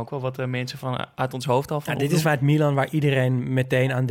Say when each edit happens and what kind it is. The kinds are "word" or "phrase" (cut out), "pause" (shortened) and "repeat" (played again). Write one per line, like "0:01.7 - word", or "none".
0:02.2 - word

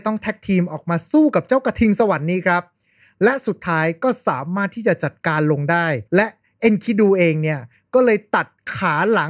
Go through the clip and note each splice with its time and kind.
0:06.1 - pause

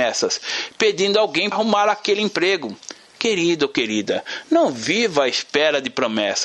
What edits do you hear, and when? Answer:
0:01.5 - word

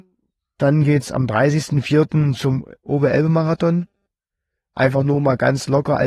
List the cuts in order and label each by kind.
none

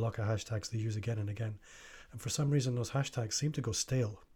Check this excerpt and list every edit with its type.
none

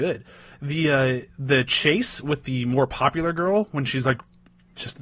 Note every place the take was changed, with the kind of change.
0:01.3 - pause

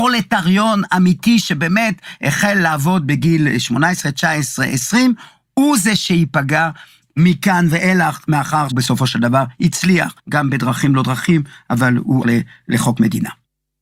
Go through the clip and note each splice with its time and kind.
0:08.7 - word
0:10.2 - pause
0:12.2 - word

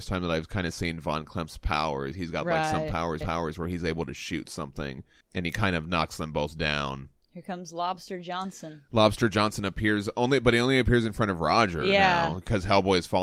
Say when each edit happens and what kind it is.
0:03.2 - repeat
0:05.2 - pause
0:07.2 - pause

